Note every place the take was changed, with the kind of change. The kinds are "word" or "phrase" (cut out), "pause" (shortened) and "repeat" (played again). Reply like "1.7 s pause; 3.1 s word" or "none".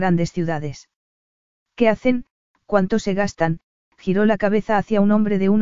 none